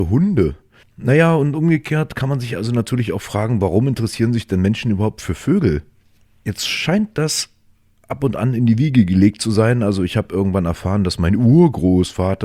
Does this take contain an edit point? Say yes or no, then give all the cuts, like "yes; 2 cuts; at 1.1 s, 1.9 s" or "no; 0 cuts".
no; 0 cuts